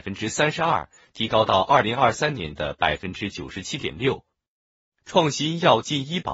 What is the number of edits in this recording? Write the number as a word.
zero